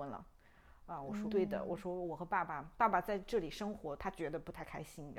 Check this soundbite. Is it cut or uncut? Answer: cut